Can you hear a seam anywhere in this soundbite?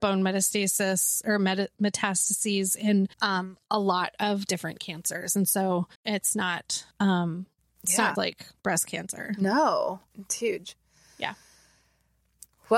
yes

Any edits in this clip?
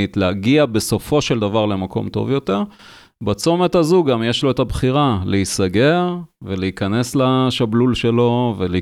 no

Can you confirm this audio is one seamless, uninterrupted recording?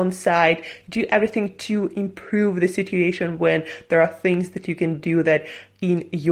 yes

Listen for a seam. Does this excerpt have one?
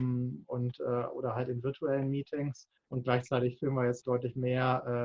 yes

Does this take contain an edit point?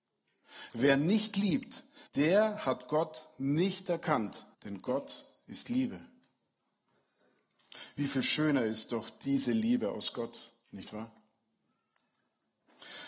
yes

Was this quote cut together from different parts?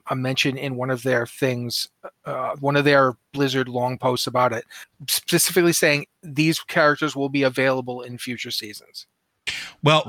no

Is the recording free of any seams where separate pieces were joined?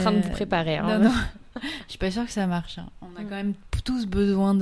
yes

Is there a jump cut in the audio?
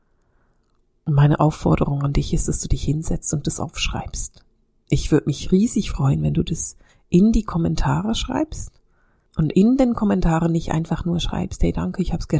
no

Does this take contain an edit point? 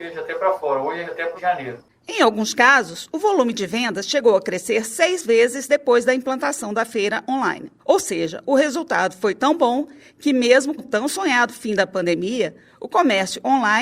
yes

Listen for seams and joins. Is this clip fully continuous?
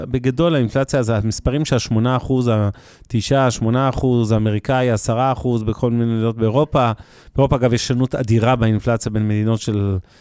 yes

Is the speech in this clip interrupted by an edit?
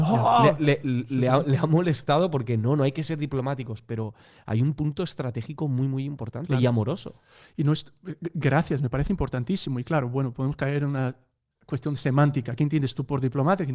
no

